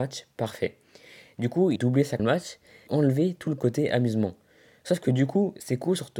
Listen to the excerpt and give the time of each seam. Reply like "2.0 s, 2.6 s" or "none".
1.8 s, 2.2 s, 2.9 s

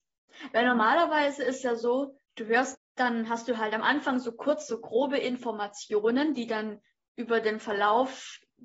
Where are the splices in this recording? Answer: 2.2 s, 2.7 s

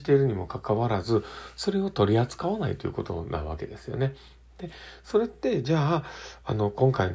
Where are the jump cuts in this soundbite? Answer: none

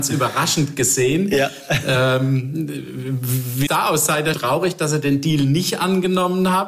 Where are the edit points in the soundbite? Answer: 3.7 s, 4.3 s

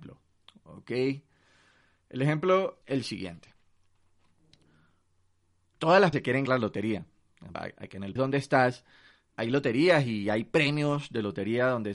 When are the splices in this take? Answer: 2.8 s, 6.1 s, 6.5 s, 7.5 s, 8.2 s, 9.3 s

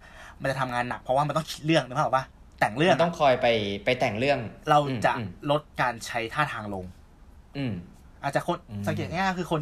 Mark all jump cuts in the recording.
4.6 s

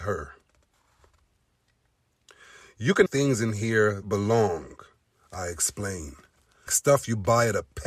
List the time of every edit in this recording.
3.1 s, 4.0 s, 6.7 s

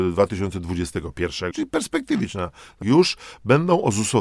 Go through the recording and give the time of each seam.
1.5 s, 2.8 s

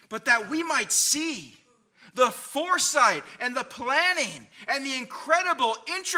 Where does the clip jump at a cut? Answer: none

